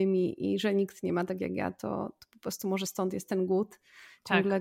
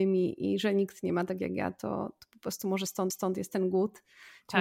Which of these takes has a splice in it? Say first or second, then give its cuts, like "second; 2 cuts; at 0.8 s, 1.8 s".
second; 1 cut; at 3.1 s